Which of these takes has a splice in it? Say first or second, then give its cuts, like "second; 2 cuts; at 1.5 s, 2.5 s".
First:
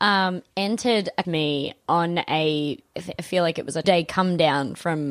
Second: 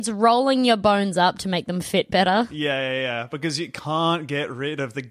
first; 3 cuts; at 1.2 s, 2.9 s, 3.8 s